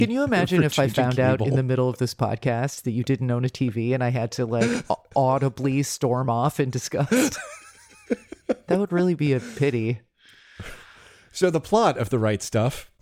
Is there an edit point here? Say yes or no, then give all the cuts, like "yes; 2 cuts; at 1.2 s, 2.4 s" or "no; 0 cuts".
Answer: no; 0 cuts